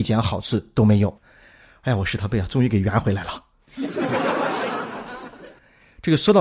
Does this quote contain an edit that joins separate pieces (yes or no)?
no